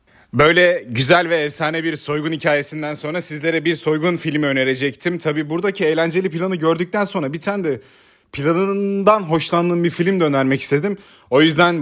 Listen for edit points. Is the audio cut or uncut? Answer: uncut